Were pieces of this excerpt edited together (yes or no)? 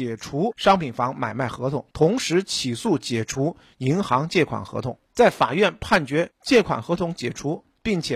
yes